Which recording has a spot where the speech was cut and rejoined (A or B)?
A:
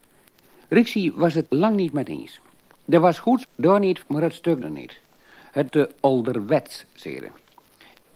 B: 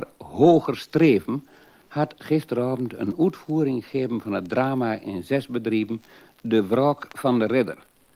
A